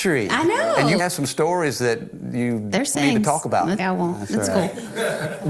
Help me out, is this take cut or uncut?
cut